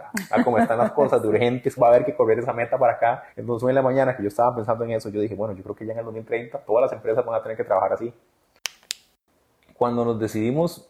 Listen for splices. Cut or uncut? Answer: cut